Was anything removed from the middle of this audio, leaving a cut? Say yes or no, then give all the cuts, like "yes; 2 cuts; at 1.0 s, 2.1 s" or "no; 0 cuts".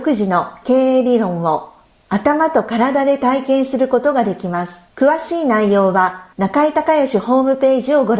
yes; 3 cuts; at 1.9 s, 4.9 s, 6.3 s